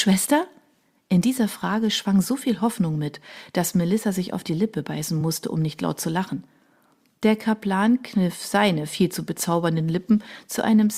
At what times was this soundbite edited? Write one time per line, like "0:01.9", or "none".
none